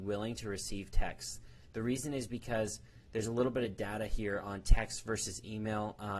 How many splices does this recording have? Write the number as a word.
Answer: zero